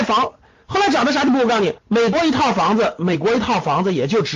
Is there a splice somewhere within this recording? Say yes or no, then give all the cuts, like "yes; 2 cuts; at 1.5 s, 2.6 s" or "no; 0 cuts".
yes; 1 cut; at 1.8 s